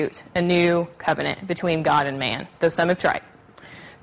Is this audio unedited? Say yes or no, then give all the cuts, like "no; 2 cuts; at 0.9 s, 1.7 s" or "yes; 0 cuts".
yes; 0 cuts